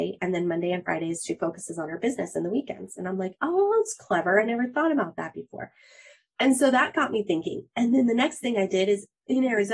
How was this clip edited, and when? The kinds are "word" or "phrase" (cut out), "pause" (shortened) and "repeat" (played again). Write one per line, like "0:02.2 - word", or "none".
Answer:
none